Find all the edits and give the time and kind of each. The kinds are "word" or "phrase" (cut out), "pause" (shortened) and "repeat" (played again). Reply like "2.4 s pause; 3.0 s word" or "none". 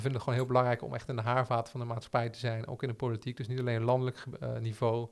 none

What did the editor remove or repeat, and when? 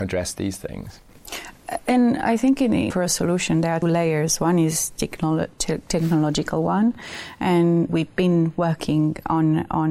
2.9 s word; 3.8 s word; 7.9 s word

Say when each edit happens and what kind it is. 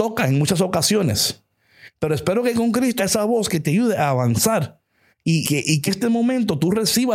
2.5 s word; 3.0 s word; 5.4 s word; 5.9 s word

